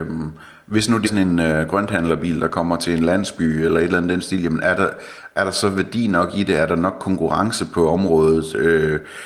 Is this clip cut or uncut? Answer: cut